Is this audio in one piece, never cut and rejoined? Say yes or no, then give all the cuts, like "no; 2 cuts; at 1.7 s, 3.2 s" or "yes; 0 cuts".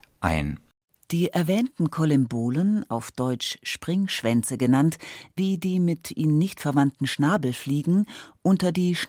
no; 1 cut; at 5.4 s